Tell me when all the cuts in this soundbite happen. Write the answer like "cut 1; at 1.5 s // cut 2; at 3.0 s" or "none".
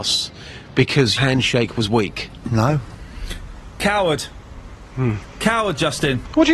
cut 1; at 1.2 s